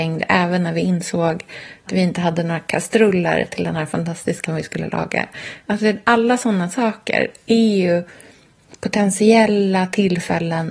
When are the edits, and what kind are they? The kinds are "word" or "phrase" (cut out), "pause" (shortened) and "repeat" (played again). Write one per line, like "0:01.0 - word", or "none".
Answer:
0:01.9 - word
0:04.4 - word

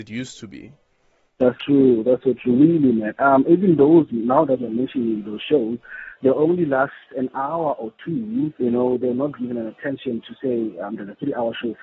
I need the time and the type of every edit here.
0:01.6 - word
0:08.6 - pause
0:09.4 - word

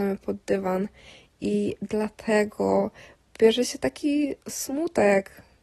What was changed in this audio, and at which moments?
0:04.4 - pause

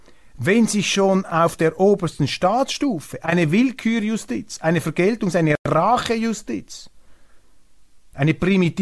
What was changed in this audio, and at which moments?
none

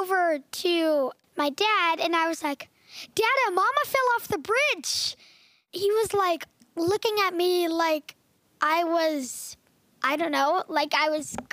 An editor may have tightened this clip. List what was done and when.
none

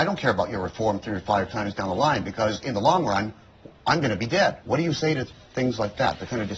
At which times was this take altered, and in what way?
0:04.6 - pause

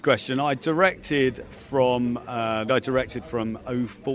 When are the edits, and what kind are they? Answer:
0:02.7 - phrase

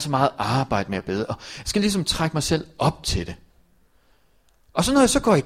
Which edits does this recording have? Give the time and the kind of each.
none

